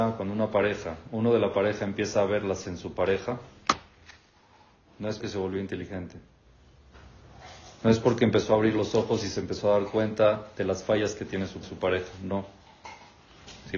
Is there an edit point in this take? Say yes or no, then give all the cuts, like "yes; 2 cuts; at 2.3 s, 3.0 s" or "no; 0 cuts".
yes; 3 cuts; at 2.6 s, 5.2 s, 11.6 s